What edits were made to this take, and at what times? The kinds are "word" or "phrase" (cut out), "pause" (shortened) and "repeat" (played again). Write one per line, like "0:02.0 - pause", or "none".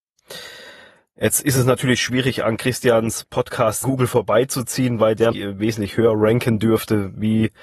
0:03.8 - phrase
0:05.3 - word